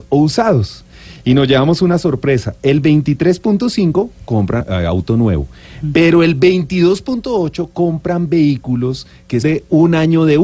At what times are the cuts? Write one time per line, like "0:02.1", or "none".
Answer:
0:04.6
0:09.4